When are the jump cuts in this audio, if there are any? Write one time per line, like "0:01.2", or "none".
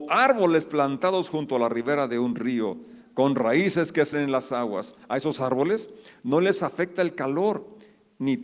0:04.1